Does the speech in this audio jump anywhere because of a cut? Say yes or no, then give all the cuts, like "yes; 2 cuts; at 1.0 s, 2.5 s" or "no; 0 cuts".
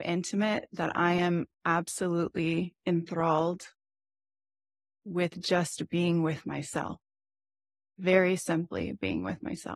no; 0 cuts